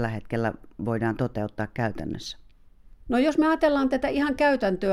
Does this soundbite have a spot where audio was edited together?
yes; 1 cut; at 3.0 s

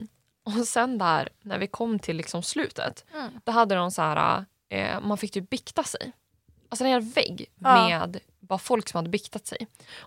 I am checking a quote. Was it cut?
no; 0 cuts

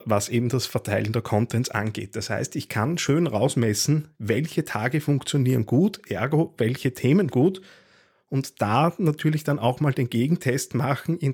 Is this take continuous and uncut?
no; 2 cuts; at 4.1 s, 7.3 s

